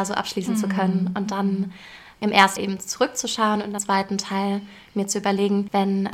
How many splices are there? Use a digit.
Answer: 2